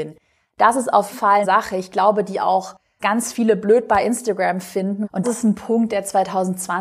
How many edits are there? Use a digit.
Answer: 4